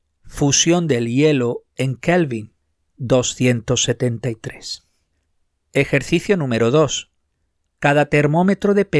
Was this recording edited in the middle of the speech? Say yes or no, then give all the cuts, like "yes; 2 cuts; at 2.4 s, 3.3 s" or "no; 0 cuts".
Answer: no; 0 cuts